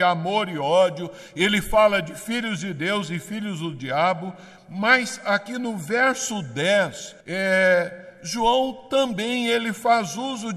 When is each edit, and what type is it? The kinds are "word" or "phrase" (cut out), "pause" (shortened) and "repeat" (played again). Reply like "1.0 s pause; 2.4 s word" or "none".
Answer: 7.2 s pause